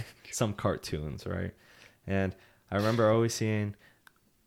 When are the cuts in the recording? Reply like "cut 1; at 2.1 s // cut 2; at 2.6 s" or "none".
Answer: none